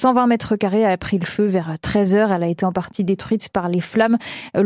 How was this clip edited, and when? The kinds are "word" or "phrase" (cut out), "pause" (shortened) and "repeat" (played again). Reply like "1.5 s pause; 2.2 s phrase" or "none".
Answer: none